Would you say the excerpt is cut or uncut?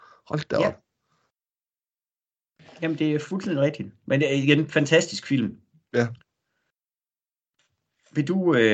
uncut